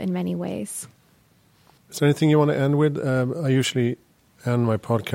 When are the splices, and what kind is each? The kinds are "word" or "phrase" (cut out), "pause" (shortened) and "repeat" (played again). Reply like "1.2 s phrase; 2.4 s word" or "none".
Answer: none